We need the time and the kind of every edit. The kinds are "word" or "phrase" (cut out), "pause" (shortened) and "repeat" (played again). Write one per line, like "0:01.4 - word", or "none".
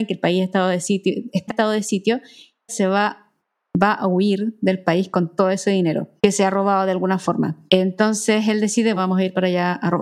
0:01.5 - word
0:02.7 - word
0:06.2 - pause
0:07.7 - pause
0:09.0 - word